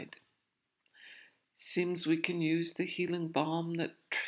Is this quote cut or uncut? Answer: uncut